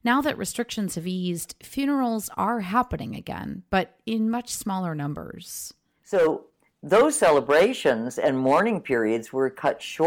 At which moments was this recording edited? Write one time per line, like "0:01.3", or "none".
none